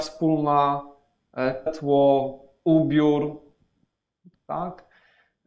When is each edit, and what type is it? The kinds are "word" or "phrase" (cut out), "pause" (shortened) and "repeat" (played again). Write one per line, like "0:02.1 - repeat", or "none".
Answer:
0:01.7 - word
0:04.3 - phrase

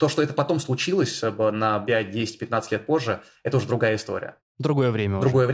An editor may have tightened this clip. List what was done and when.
none

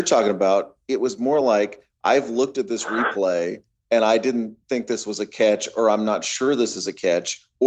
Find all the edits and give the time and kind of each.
none

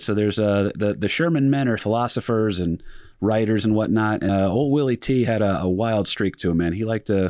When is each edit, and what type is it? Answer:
0:01.8 - phrase
0:04.3 - word

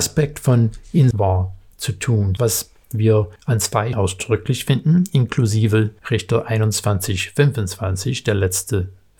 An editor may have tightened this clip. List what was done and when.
0:01.1 - phrase
0:02.4 - phrase
0:03.4 - pause
0:03.9 - word
0:06.0 - pause

